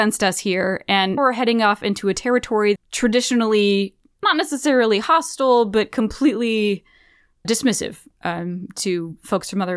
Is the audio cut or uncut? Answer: cut